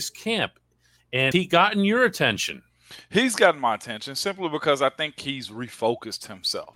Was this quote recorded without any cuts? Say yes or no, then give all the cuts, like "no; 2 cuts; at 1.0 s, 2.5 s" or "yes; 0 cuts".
no; 1 cut; at 1.3 s